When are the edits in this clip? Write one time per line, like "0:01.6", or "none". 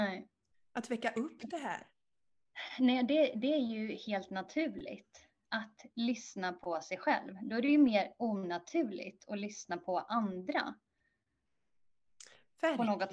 none